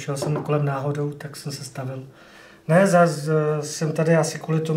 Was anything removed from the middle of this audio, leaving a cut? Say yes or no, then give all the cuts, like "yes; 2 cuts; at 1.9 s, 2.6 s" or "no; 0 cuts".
no; 0 cuts